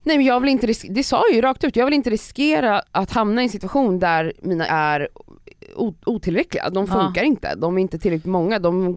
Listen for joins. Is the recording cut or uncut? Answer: cut